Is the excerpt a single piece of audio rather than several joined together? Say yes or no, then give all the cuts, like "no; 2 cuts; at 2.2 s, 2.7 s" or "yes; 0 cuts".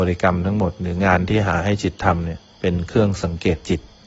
no; 1 cut; at 2.5 s